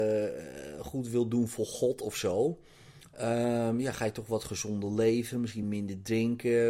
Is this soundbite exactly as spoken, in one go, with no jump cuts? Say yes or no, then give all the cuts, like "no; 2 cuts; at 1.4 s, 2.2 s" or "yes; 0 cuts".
yes; 0 cuts